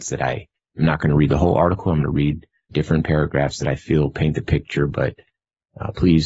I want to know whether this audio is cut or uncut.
cut